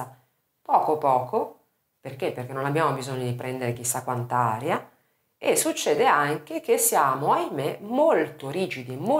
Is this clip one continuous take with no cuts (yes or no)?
yes